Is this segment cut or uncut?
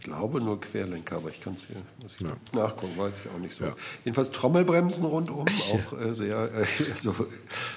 cut